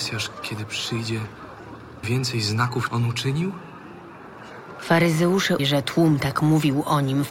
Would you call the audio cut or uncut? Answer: cut